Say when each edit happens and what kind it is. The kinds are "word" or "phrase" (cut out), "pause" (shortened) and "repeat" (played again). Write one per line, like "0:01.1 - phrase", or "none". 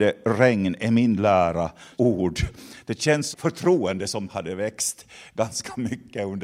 0:02.0 - phrase
0:03.3 - phrase
0:04.3 - word